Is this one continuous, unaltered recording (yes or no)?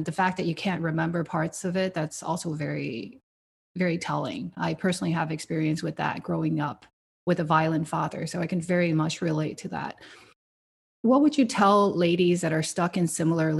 yes